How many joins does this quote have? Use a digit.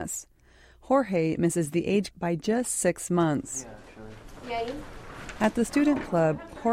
1